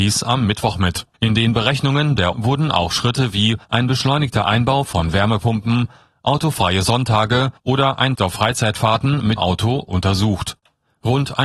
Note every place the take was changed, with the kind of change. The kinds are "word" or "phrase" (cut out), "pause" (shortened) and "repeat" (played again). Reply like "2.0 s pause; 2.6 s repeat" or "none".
1.1 s pause; 2.3 s word; 3.6 s pause; 7.6 s pause; 8.2 s phrase; 9.4 s word